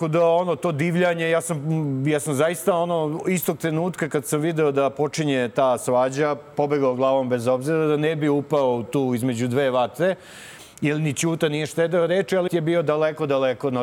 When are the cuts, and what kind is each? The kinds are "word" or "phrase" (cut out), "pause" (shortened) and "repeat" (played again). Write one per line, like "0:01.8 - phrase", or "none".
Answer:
0:12.5 - word